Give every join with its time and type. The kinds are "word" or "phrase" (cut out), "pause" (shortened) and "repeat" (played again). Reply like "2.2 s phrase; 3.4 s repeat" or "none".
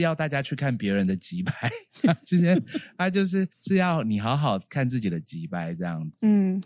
3.5 s pause